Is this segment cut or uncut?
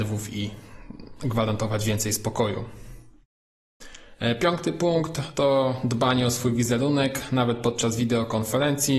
uncut